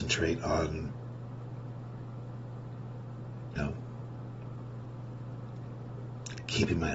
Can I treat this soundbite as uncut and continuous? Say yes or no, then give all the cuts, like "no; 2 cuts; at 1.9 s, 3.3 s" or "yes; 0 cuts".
no; 1 cut; at 3.6 s